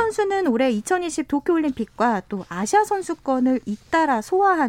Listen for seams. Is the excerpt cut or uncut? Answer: uncut